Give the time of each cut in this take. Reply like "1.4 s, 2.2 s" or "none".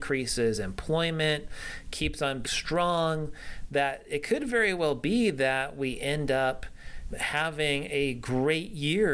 2.4 s, 7.1 s